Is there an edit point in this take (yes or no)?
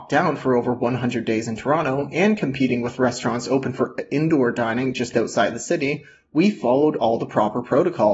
no